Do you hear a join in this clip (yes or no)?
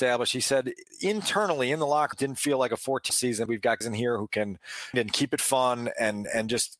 yes